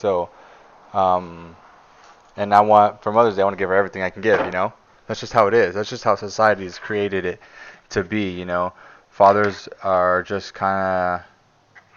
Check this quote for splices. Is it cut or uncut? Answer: uncut